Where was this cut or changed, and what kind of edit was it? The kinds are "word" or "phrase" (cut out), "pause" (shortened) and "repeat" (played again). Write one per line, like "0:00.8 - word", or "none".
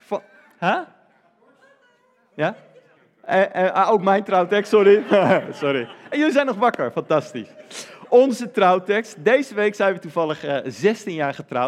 0:03.0 - pause